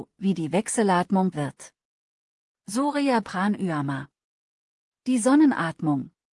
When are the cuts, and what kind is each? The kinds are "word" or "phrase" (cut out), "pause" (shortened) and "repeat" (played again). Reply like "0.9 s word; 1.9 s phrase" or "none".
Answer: 1.3 s word; 3.2 s word